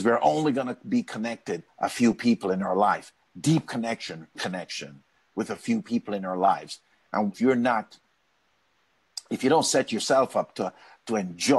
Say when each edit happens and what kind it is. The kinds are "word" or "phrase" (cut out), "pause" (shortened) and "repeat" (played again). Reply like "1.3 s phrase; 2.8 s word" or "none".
1.7 s word; 4.3 s word; 7.3 s word